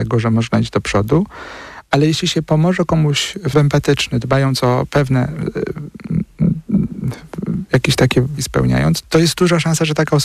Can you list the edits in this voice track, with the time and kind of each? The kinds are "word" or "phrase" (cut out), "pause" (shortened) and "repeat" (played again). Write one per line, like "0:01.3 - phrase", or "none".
0:03.5 - word
0:08.4 - word
0:09.0 - word